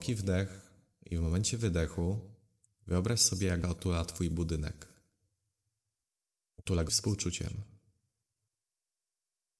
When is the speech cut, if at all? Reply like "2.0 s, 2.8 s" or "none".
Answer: 3.6 s, 6.9 s